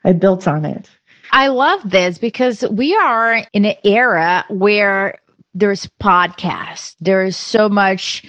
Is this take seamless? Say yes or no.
yes